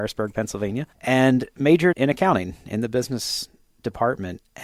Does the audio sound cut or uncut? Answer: cut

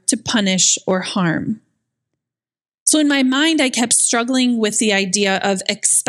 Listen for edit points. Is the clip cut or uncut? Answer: uncut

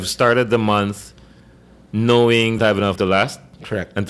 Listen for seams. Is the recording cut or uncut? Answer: cut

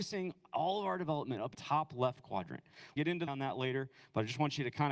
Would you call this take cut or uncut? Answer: cut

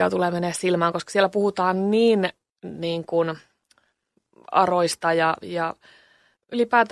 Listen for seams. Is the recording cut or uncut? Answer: uncut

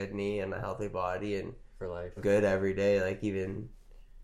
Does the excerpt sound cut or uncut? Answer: cut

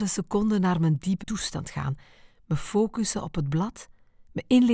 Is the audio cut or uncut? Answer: cut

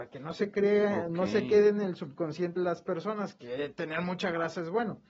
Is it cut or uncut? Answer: cut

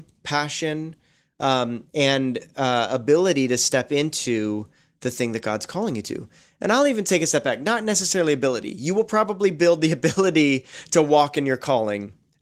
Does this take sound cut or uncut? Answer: uncut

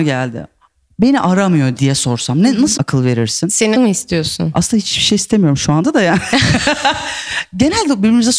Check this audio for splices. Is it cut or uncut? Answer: cut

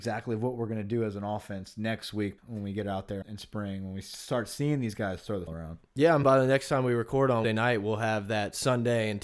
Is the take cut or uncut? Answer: cut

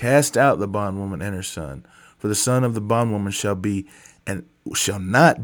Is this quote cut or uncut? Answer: uncut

